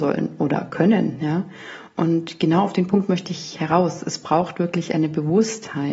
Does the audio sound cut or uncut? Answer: uncut